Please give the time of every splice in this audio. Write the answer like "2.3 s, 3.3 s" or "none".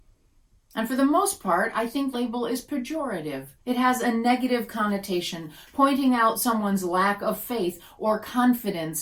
2.1 s, 3.6 s